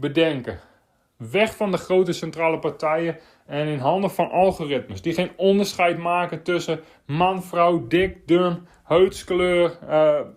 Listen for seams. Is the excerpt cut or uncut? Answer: uncut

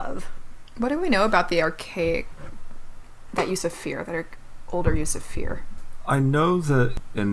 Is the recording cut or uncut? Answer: cut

